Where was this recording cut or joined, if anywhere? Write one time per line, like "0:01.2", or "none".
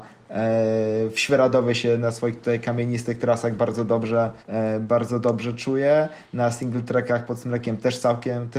0:04.4